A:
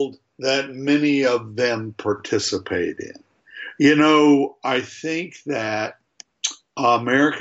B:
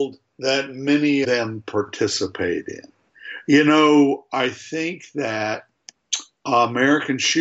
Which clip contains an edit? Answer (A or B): B